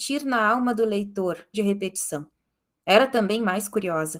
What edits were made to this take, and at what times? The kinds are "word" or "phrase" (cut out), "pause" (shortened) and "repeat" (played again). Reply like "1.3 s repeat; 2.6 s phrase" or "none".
1.5 s phrase